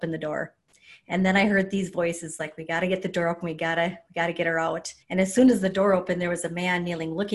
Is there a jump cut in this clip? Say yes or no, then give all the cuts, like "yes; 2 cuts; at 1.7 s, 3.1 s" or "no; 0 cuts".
yes; 1 cut; at 5.0 s